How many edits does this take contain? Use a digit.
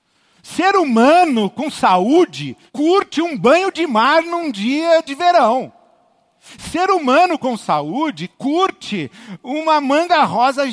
2